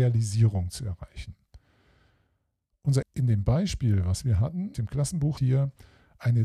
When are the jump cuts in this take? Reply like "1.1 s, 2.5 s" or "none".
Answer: 3.0 s, 4.7 s, 5.4 s